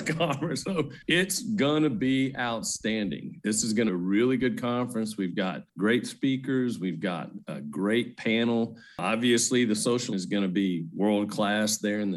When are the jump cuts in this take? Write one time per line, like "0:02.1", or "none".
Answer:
0:01.0
0:03.9
0:05.7
0:10.1